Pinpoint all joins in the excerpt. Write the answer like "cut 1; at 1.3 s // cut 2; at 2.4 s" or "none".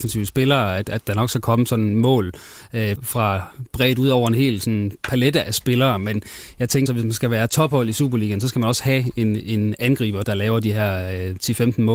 cut 1; at 3.0 s // cut 2; at 6.9 s // cut 3; at 10.2 s